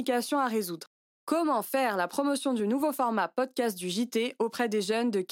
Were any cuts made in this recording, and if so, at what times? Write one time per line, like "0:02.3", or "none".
none